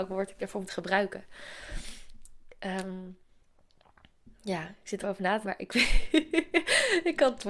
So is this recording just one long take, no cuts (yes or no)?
no